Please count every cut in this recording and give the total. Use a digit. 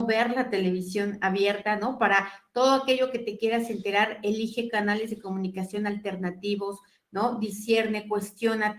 0